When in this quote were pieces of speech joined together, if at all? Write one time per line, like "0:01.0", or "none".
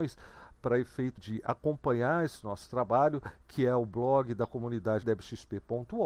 0:01.2
0:05.0